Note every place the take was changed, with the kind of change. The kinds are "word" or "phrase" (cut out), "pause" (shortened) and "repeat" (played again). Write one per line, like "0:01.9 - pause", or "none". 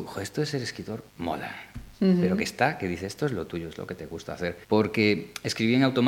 0:01.1 - pause
0:04.6 - pause